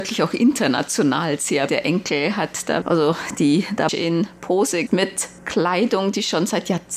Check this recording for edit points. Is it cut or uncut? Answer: cut